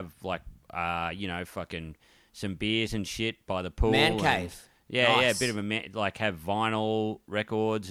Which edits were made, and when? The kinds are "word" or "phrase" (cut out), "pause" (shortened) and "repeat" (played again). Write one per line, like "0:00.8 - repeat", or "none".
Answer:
none